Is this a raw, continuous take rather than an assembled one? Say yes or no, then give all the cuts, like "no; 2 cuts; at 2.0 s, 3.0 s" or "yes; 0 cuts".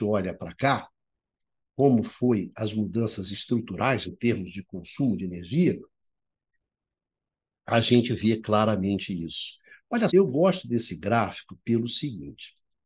no; 2 cuts; at 4.1 s, 10.1 s